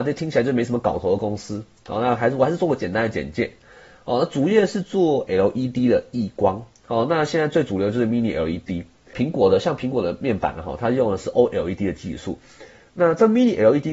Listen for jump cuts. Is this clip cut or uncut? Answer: uncut